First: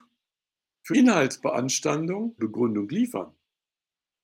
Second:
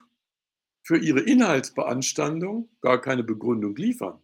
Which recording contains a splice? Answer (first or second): first